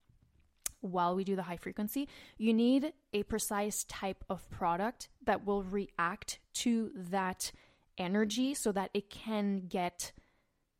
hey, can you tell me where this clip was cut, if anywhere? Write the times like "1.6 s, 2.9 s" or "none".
none